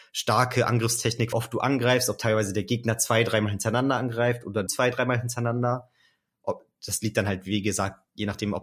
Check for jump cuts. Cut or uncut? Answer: cut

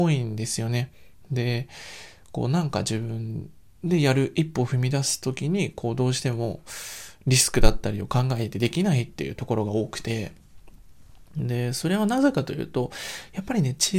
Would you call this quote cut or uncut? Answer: uncut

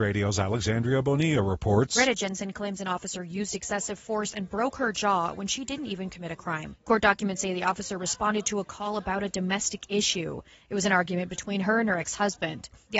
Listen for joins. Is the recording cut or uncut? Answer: uncut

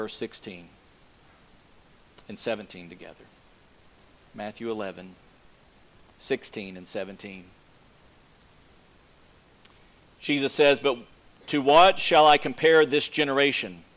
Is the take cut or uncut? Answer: uncut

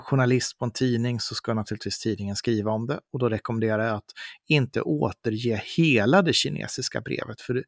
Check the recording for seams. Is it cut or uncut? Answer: uncut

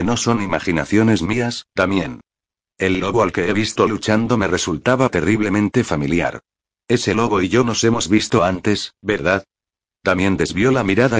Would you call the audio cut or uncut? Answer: uncut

